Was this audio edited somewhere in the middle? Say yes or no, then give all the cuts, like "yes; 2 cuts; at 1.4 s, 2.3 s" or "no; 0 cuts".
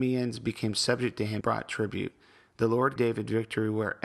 yes; 2 cuts; at 1.4 s, 3.0 s